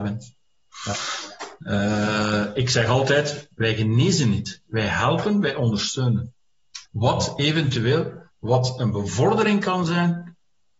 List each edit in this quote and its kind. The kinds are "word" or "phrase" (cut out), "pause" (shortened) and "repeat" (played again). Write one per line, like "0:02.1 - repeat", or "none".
0:06.9 - pause
0:08.3 - pause